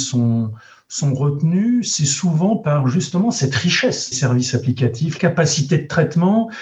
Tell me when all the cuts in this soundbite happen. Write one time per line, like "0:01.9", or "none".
0:04.1
0:05.2